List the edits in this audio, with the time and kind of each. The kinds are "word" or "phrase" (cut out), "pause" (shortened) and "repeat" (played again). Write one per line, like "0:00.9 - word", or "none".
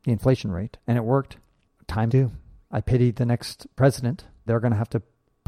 0:02.1 - word
0:02.7 - word
0:04.5 - word